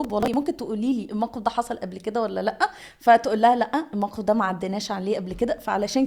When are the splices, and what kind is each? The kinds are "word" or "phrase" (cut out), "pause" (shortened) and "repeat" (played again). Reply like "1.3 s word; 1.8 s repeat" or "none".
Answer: none